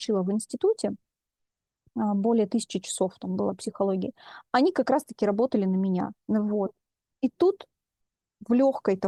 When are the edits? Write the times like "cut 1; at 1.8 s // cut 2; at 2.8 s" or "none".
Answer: cut 1; at 6.1 s